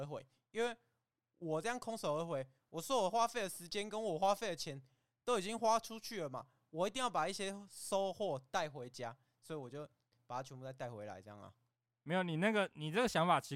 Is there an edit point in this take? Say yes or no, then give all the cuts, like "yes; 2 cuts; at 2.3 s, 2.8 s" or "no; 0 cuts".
no; 0 cuts